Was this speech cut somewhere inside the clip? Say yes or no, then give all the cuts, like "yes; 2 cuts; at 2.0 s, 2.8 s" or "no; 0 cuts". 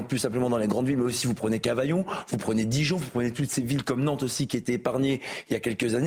no; 0 cuts